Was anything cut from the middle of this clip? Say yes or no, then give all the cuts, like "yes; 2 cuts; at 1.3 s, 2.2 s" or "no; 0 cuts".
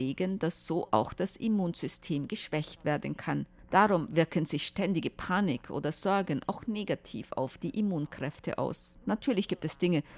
no; 0 cuts